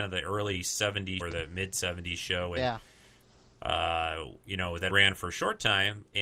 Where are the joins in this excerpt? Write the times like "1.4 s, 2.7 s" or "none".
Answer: 1.2 s, 4.4 s, 4.9 s